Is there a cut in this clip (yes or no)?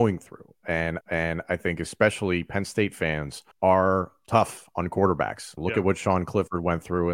yes